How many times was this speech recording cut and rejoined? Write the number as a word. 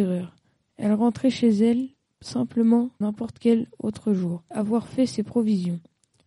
two